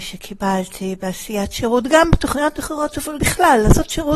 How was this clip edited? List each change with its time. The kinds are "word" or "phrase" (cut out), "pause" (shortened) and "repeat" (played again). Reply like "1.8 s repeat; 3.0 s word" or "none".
3.2 s word